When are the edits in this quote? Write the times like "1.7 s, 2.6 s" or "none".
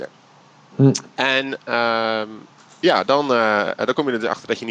none

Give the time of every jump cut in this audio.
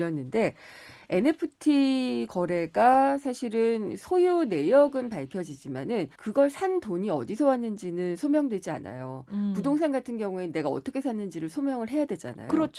6.1 s

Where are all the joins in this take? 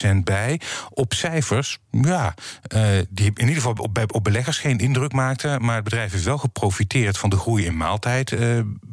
none

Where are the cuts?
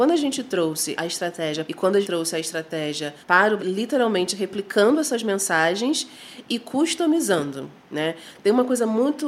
1.0 s, 1.7 s, 2.0 s, 3.2 s, 3.6 s

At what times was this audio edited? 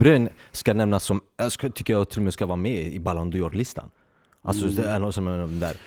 none

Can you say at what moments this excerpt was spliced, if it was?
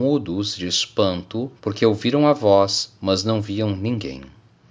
1.6 s

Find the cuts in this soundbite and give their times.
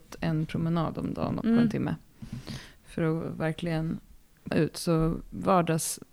1.4 s, 4.5 s

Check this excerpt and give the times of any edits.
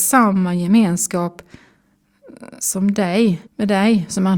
3.5 s

